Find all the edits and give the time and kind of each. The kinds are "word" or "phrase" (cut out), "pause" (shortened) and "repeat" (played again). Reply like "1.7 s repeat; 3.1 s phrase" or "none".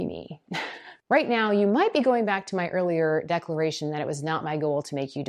1.0 s pause